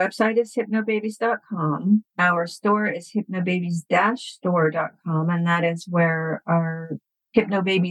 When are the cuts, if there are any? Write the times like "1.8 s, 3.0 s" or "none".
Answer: 2.1 s